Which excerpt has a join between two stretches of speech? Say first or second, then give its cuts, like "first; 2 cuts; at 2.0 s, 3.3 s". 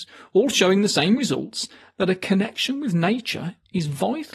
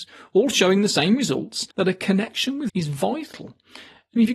second; 2 cuts; at 1.7 s, 2.7 s